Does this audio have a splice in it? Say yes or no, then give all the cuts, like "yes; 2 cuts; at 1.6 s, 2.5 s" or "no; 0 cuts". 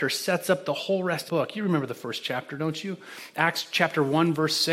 yes; 1 cut; at 1.3 s